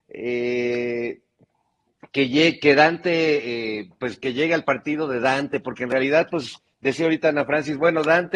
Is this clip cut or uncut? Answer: uncut